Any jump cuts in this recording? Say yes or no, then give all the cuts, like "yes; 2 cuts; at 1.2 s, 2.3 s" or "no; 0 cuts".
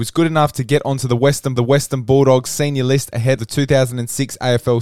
yes; 2 cuts; at 1.6 s, 3.4 s